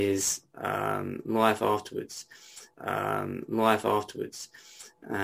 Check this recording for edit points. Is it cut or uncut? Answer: cut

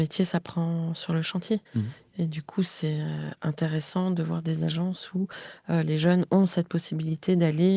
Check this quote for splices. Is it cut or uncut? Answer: cut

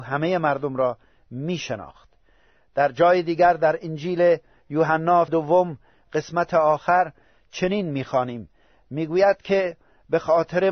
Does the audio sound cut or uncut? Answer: cut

